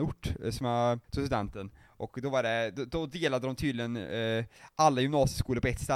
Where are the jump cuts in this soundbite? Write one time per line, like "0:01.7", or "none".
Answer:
0:01.0